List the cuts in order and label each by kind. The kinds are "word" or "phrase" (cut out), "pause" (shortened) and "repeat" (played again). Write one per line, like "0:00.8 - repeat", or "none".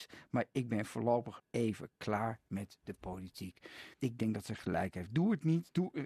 0:01.4 - word
0:03.9 - pause